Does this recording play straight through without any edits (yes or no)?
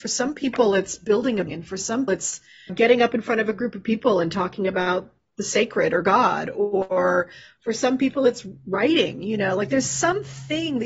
no